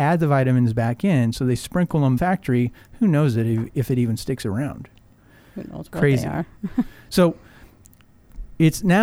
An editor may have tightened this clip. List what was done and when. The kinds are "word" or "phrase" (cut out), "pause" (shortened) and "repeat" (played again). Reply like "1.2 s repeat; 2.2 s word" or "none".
2.2 s phrase